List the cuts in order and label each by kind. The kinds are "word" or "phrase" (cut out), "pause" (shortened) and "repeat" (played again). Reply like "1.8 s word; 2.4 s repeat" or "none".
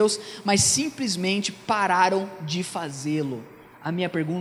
none